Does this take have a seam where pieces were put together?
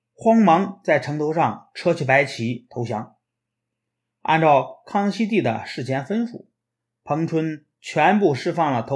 no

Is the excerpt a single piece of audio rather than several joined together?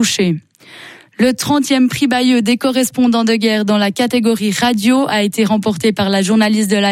yes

